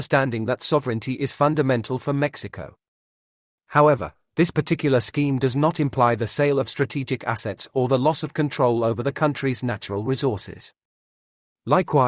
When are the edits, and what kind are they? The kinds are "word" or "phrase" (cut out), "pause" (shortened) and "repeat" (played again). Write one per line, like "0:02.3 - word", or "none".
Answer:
none